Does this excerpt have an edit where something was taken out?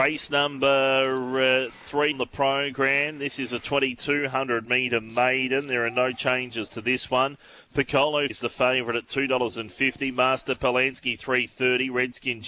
yes; 2 cuts; at 2.1 s, 8.3 s

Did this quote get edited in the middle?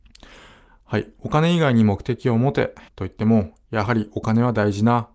yes; 1 cut; at 2.9 s

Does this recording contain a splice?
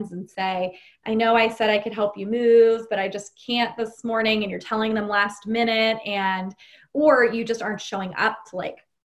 no; 0 cuts

